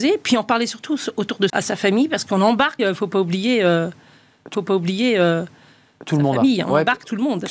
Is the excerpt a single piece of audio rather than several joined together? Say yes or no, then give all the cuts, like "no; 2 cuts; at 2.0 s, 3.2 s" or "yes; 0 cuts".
no; 3 cuts; at 1.5 s, 2.8 s, 4.5 s